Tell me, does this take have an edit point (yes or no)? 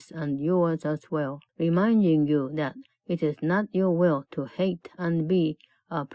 yes